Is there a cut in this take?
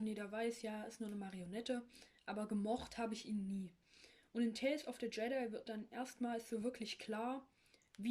no; 0 cuts

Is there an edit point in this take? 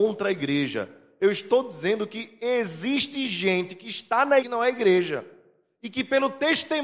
yes; 1 cut; at 4.4 s

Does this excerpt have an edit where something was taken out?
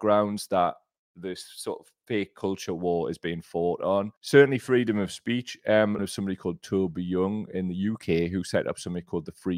yes; 2 cuts; at 4.2 s, 6.0 s

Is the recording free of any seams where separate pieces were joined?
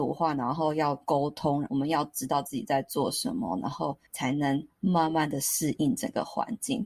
no; 1 cut; at 4.1 s

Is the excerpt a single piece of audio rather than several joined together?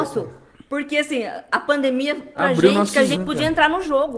no; 2 cuts; at 2.3 s, 3.1 s

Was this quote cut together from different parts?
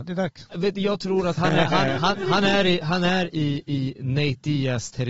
no; 0 cuts

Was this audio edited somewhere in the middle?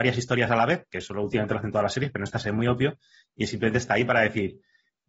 no; 0 cuts

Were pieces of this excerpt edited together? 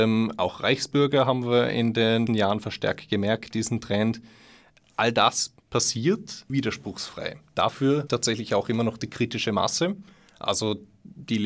yes; 3 cuts; at 2.3 s, 6.5 s, 8.1 s

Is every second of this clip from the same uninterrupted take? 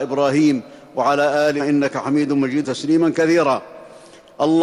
no; 2 cuts; at 1.6 s, 2.6 s

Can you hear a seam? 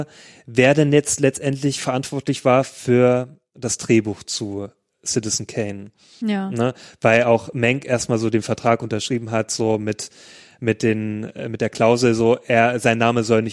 no; 0 cuts

